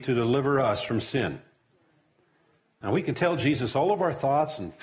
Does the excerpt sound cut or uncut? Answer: uncut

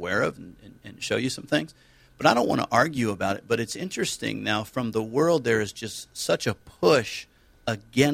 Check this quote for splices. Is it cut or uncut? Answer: uncut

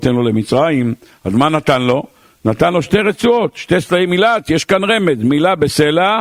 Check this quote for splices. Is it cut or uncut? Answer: uncut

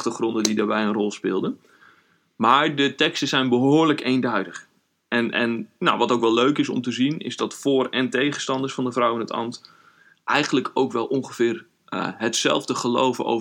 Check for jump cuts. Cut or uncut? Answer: uncut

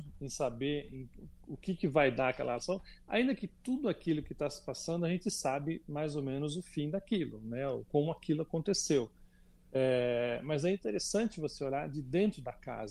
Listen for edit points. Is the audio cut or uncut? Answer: uncut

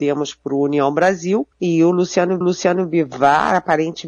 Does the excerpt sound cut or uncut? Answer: cut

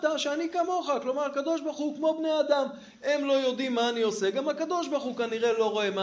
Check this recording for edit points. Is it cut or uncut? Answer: uncut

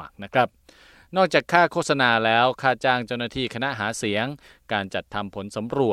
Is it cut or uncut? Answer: uncut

